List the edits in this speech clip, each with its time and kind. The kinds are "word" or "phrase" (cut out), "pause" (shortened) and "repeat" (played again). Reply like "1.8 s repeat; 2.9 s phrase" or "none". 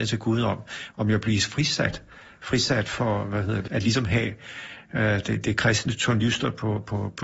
3.7 s word